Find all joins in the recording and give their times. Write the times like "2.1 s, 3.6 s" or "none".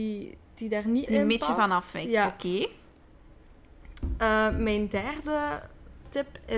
1.0 s